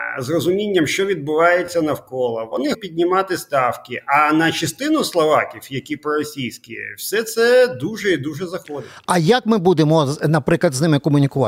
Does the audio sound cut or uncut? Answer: cut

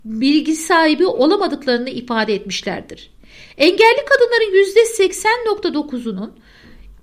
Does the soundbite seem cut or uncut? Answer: uncut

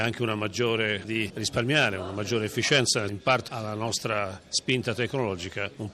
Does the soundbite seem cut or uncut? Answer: cut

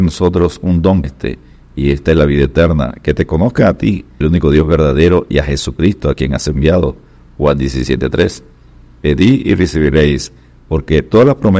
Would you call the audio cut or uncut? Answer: cut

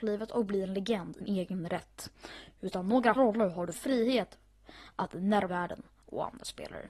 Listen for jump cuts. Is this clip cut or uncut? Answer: cut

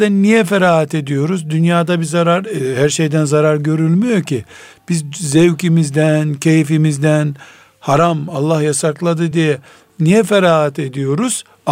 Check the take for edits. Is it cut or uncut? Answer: uncut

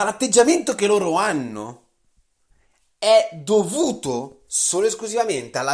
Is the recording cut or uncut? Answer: uncut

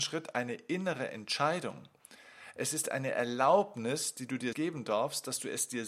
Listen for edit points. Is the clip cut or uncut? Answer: cut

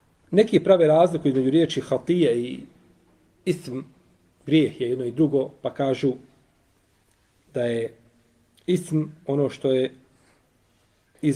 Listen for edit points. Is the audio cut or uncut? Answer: uncut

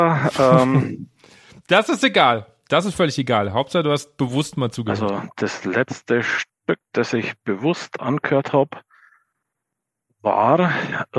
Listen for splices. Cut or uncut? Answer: uncut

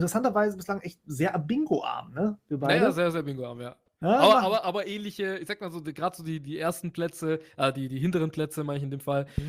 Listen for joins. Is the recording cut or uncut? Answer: uncut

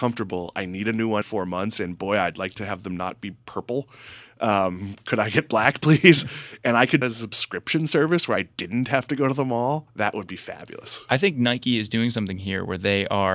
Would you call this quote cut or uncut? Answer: cut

